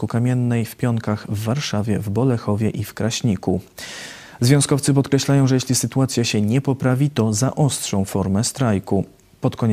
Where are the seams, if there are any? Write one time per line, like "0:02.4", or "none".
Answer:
none